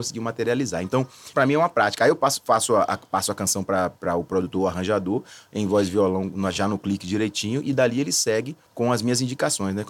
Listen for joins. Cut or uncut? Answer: cut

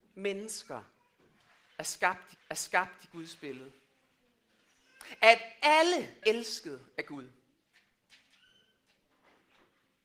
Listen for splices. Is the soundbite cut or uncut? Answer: cut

